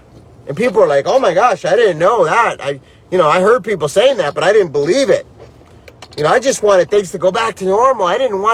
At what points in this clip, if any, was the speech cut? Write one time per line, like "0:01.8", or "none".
none